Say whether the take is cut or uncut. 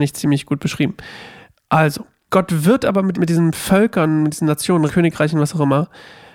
cut